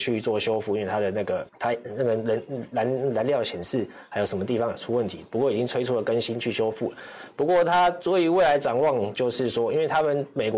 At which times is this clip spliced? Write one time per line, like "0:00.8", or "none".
0:01.5